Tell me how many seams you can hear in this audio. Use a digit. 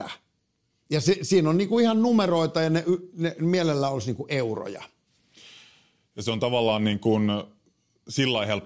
0